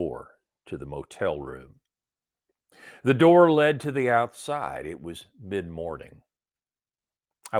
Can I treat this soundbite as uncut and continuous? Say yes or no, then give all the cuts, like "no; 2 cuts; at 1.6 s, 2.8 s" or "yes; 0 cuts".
yes; 0 cuts